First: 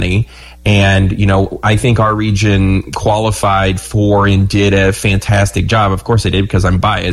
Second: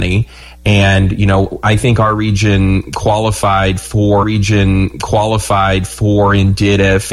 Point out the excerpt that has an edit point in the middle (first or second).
second